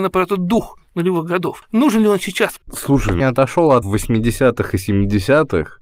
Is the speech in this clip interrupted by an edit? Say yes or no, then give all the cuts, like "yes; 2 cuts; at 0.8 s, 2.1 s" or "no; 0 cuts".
yes; 3 cuts; at 2.6 s, 3.2 s, 3.8 s